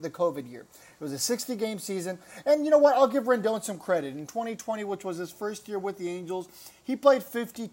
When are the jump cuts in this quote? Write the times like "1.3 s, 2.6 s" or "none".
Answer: none